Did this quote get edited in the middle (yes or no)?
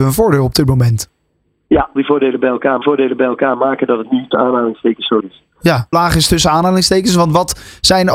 yes